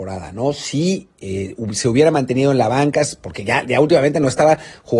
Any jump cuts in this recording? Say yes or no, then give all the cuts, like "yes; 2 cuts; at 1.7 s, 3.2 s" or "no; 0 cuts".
no; 0 cuts